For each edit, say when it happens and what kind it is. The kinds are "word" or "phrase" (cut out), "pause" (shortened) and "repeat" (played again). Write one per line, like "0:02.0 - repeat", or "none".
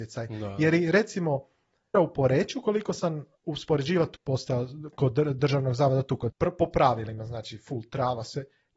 0:01.9 - word
0:03.3 - pause
0:04.1 - word
0:06.3 - word